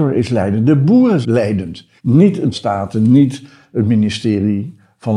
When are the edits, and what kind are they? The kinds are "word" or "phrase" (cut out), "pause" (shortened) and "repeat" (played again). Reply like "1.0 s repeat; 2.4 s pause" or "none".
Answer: 1.2 s word; 2.0 s pause; 2.5 s word